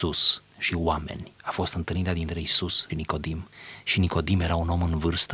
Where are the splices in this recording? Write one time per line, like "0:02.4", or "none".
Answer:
0:02.9